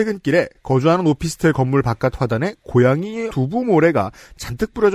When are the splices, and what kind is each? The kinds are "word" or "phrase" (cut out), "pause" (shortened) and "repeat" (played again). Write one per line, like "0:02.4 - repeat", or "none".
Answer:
0:03.3 - word